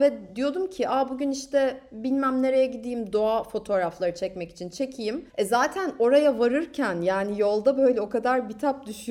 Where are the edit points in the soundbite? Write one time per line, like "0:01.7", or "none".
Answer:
0:05.3